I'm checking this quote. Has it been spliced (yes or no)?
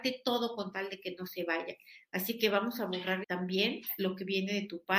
yes